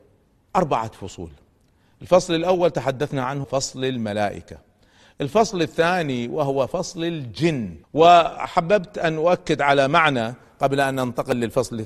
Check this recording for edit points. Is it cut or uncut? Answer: cut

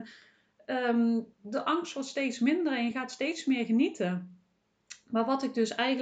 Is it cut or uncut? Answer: uncut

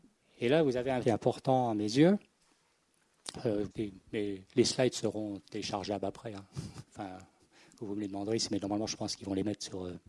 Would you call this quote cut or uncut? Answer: cut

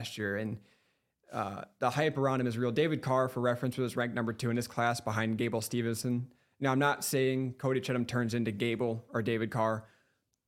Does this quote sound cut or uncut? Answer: uncut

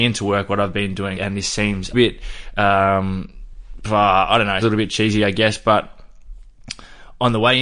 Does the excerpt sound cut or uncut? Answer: cut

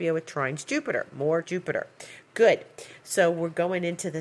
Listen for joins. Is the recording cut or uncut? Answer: cut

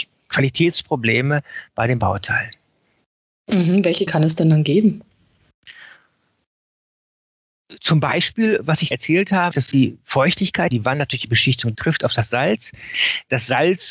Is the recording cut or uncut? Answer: cut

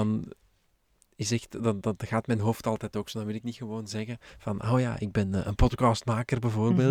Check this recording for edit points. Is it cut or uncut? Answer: uncut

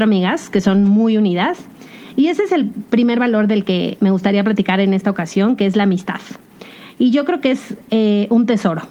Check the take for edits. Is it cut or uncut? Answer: uncut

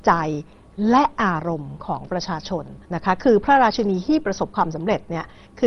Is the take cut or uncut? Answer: cut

